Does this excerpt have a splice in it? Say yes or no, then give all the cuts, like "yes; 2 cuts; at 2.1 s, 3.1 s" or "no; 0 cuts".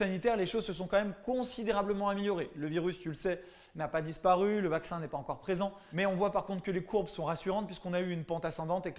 no; 0 cuts